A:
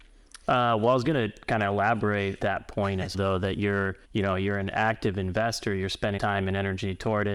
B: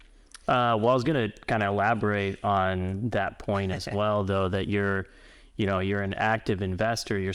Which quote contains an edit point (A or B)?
A